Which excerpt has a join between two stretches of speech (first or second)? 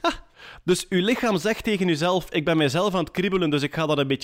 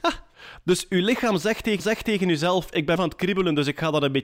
second